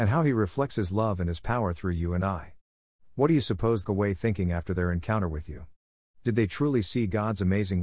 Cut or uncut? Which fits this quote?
cut